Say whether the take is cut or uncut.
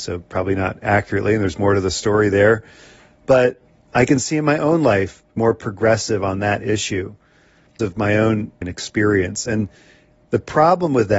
cut